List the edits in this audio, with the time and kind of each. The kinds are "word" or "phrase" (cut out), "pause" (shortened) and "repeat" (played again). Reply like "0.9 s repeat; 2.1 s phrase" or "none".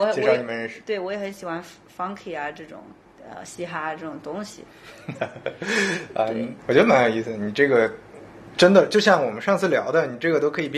none